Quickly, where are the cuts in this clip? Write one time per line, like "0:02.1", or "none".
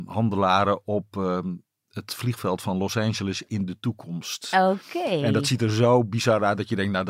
none